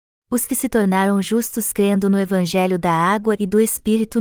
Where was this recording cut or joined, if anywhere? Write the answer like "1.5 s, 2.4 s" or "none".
none